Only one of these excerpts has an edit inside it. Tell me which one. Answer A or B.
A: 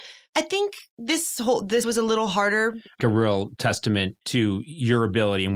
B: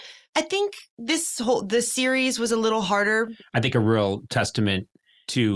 A